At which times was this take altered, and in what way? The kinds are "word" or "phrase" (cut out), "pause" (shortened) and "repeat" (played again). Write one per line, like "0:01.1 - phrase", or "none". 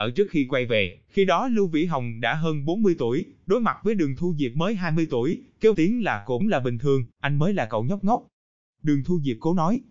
0:01.1 - pause
0:05.7 - word
0:06.4 - phrase
0:07.1 - pause